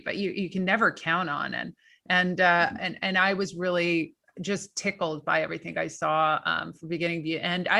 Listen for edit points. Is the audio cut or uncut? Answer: uncut